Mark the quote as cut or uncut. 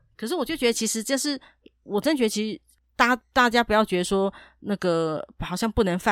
uncut